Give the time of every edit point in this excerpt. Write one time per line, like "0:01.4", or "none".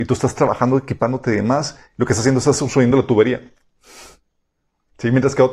none